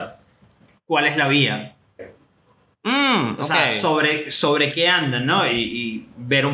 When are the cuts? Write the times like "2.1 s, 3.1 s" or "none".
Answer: none